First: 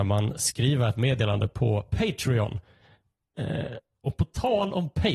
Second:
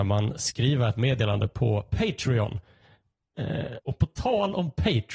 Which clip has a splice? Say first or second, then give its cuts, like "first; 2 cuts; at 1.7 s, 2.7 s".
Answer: second; 1 cut; at 3.8 s